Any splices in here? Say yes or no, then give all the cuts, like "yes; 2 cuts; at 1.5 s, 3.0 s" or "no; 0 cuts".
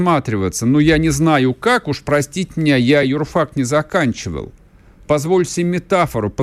no; 0 cuts